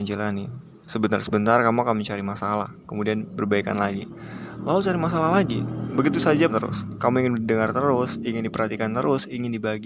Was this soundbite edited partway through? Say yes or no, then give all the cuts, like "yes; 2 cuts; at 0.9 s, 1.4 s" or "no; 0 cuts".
yes; 1 cut; at 6.5 s